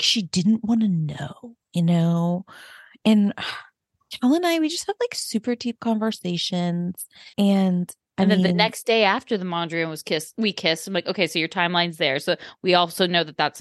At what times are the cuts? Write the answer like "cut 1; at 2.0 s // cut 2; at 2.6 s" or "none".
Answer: cut 1; at 7.3 s